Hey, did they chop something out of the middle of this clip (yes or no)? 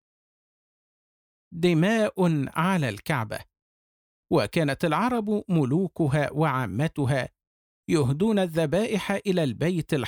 no